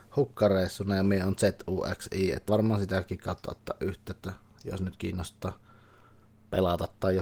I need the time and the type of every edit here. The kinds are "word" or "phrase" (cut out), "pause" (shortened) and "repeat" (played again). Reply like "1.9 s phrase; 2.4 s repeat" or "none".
2.5 s word